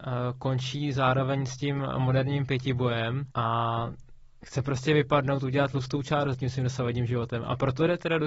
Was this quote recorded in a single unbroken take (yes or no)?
no